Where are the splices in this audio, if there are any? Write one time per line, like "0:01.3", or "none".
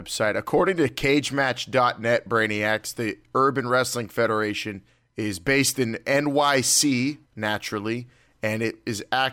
0:04.9
0:07.3